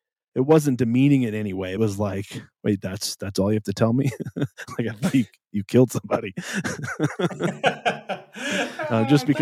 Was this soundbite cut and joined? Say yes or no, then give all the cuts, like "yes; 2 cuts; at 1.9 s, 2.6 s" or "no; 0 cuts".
yes; 1 cut; at 1.8 s